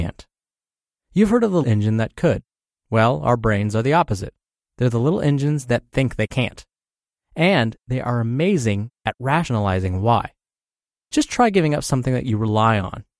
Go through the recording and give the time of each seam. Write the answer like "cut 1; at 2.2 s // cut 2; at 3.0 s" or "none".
cut 1; at 1.6 s